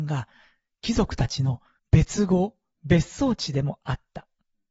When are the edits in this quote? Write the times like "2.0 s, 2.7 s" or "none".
1.8 s